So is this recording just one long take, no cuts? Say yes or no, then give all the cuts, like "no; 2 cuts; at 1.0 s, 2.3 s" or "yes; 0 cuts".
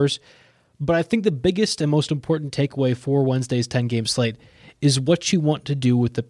yes; 0 cuts